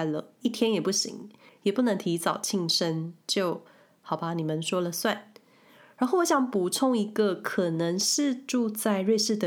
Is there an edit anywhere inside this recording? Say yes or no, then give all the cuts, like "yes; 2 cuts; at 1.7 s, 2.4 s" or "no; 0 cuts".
no; 0 cuts